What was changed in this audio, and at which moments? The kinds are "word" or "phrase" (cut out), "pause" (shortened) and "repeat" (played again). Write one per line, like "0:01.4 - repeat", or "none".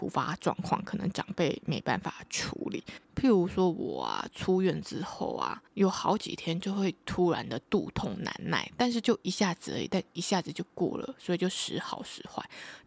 0:03.0 - pause
0:05.7 - pause